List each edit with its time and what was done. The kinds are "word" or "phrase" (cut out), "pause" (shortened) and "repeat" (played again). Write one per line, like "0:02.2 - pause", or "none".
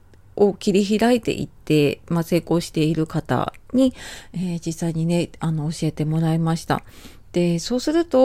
none